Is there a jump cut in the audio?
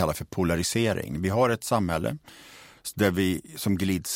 no; 0 cuts

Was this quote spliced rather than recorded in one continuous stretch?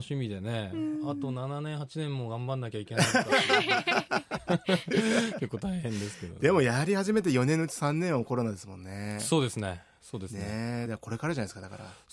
yes; 1 cut; at 10.9 s

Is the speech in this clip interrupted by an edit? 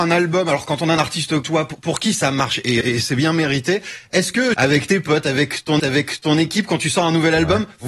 yes; 4 cuts; at 1.4 s, 2.8 s, 4.5 s, 5.8 s

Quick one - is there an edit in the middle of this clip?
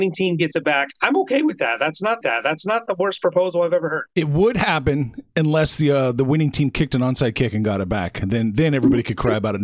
yes; 2 cuts; at 2.2 s, 5.3 s

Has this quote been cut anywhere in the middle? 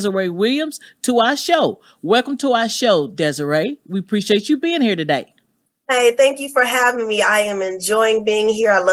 yes; 1 cut; at 5.7 s

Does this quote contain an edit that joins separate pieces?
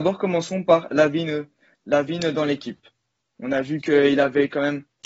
no; 0 cuts

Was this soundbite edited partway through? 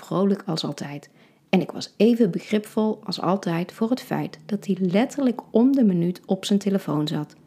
no; 0 cuts

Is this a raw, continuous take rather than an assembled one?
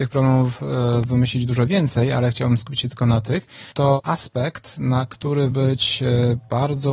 no; 1 cut; at 5.5 s

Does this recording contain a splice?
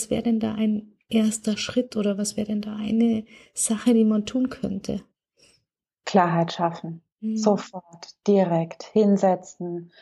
yes; 1 cut; at 7.1 s

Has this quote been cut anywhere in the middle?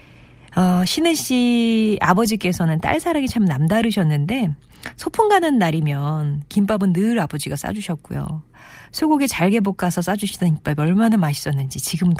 no; 0 cuts

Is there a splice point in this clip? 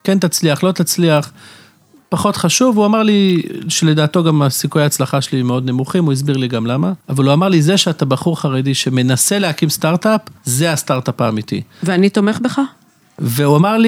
yes; 2 cuts; at 7.0 s, 10.4 s

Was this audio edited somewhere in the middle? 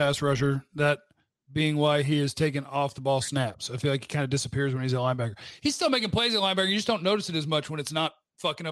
no; 0 cuts

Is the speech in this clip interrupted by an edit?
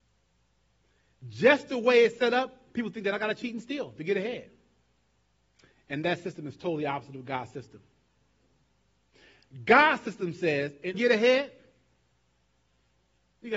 yes; 2 cuts; at 5.2 s, 10.9 s

